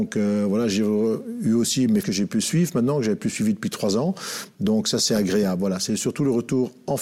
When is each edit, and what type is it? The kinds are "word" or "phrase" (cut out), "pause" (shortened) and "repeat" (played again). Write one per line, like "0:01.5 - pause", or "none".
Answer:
0:02.0 - word